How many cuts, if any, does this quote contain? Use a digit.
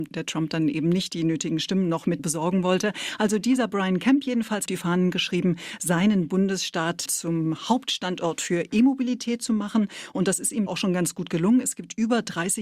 4